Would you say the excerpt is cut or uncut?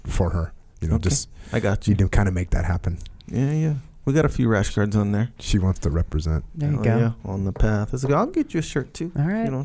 uncut